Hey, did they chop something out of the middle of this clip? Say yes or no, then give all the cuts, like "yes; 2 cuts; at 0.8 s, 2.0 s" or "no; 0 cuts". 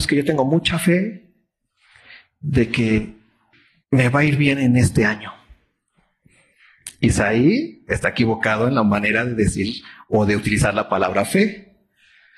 yes; 1 cut; at 3.5 s